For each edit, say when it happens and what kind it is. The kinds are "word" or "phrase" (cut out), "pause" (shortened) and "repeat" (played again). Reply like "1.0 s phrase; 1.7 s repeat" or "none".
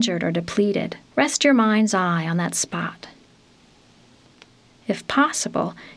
1.1 s pause